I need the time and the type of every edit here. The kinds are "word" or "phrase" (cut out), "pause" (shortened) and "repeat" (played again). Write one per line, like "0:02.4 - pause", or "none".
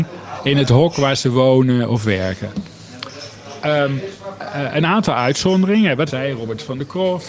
0:06.1 - phrase